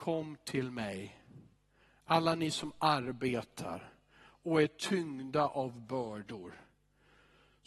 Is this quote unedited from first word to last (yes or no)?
yes